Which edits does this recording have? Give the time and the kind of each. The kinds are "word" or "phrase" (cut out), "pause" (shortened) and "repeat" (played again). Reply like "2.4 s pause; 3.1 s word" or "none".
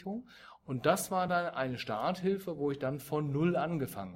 none